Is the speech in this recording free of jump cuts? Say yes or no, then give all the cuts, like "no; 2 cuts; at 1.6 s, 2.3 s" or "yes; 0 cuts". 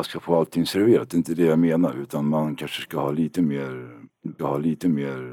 no; 1 cut; at 4.4 s